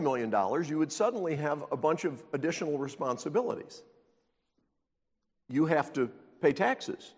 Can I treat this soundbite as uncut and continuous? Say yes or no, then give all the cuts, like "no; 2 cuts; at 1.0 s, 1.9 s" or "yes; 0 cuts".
yes; 0 cuts